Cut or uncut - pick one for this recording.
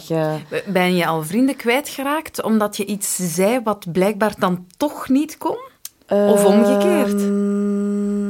uncut